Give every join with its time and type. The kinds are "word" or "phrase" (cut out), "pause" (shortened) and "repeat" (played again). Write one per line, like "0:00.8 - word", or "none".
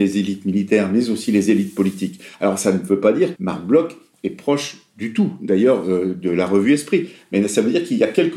0:03.3 - word